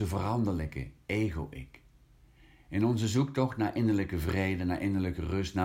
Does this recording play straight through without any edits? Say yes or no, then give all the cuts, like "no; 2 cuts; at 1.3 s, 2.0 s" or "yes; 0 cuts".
yes; 0 cuts